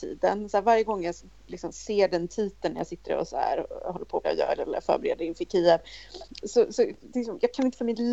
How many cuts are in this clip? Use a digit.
3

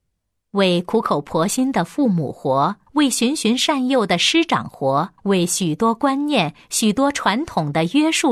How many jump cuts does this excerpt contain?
2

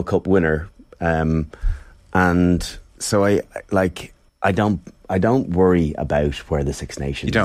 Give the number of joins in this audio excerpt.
2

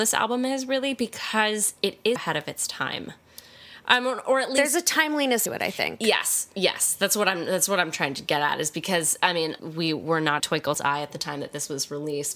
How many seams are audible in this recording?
5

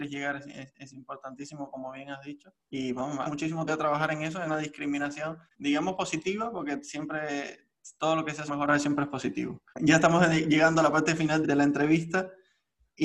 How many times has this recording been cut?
9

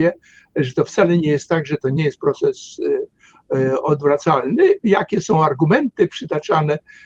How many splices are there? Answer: 0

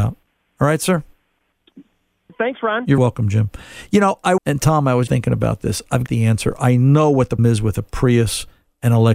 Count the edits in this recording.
6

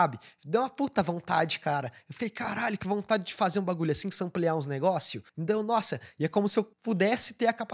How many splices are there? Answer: 2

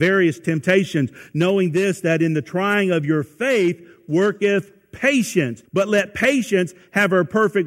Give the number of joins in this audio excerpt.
1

